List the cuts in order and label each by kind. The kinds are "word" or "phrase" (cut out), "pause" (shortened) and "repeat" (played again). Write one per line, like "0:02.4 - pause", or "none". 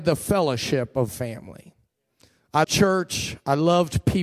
0:01.1 - word
0:02.6 - word